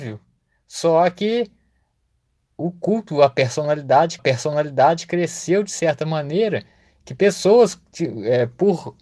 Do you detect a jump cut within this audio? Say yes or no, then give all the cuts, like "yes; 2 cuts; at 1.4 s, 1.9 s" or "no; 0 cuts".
yes; 1 cut; at 4.2 s